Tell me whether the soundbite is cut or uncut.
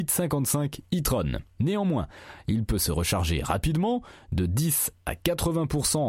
uncut